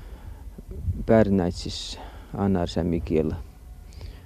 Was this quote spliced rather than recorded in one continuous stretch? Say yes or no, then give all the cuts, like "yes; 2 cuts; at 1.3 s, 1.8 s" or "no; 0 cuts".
no; 0 cuts